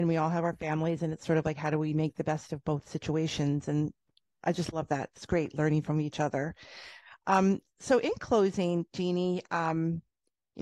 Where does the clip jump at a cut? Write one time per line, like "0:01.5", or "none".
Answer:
none